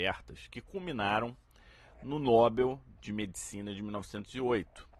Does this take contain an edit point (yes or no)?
no